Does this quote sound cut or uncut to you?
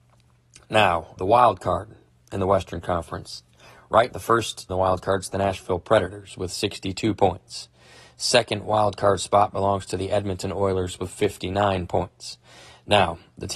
cut